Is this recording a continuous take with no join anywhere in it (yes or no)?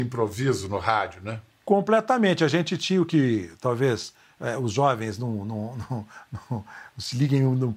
yes